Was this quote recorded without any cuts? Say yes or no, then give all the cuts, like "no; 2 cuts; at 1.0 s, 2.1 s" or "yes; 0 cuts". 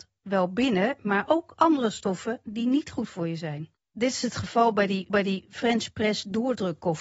no; 1 cut; at 5.1 s